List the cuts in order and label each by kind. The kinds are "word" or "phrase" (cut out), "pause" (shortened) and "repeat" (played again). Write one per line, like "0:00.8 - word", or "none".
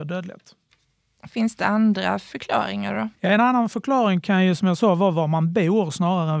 0:03.1 - pause